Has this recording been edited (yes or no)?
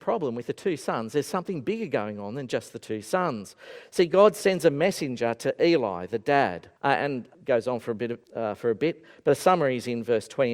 yes